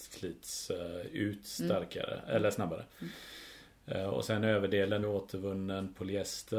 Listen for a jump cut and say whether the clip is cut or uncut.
cut